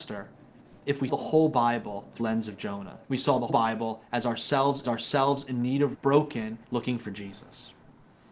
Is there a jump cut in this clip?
yes; 7 cuts; at 1.1 s, 2.2 s, 3.0 s, 3.5 s, 4.8 s, 5.9 s, 6.6 s

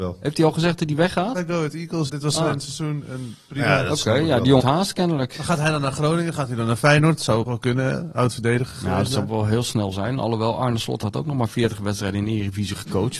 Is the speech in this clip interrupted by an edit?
yes; 3 cuts; at 2.1 s, 4.6 s, 7.5 s

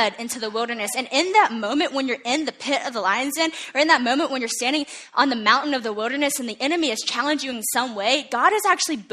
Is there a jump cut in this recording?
no; 0 cuts

